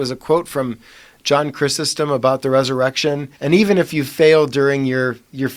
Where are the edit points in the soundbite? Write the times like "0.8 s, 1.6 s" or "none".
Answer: 3.4 s